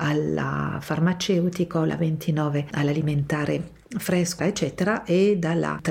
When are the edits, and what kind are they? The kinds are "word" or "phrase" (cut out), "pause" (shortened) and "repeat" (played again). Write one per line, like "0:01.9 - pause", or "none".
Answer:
0:04.4 - word